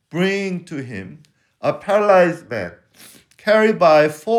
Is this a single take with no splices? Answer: yes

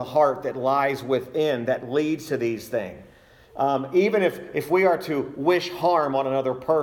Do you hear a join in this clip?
no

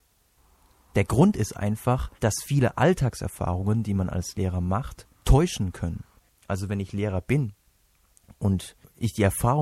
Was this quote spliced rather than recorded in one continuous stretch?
yes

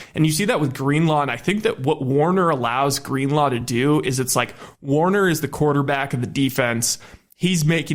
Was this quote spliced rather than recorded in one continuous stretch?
no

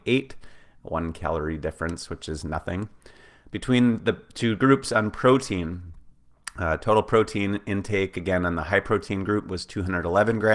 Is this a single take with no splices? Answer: yes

